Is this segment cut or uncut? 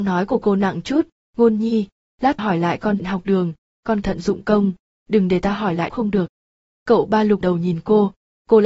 cut